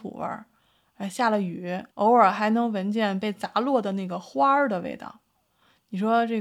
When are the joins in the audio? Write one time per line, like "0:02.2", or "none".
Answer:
0:01.9